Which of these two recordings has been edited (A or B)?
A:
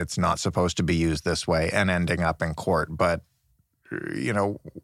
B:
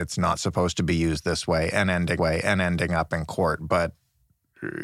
B